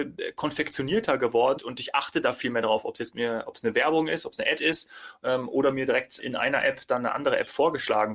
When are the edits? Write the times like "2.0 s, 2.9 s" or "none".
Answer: 1.6 s, 6.2 s